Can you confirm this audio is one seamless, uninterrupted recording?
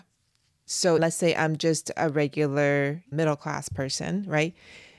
yes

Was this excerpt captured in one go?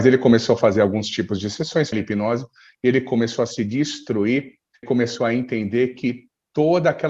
no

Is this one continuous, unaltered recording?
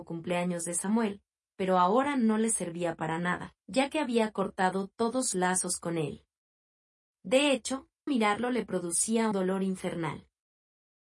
no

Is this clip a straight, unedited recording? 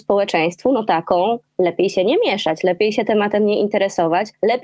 yes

